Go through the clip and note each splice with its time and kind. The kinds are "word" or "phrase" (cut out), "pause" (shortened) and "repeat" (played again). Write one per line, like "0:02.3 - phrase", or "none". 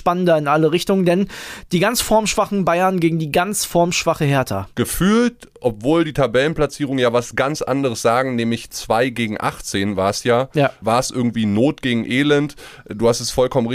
0:04.7 - pause